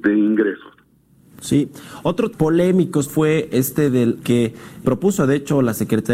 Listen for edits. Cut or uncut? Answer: cut